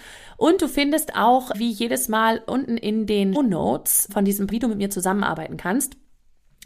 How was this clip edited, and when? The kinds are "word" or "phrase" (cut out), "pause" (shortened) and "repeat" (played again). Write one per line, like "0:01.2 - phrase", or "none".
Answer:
0:01.5 - word
0:03.3 - word
0:04.1 - word
0:04.5 - phrase